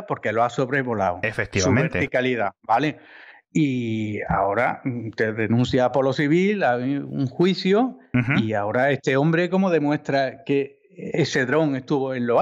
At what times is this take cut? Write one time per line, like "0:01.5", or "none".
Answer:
none